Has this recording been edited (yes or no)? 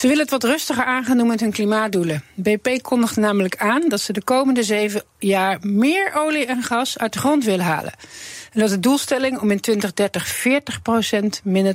no